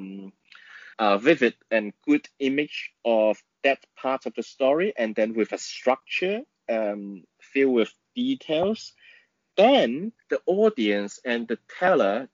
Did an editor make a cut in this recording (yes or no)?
yes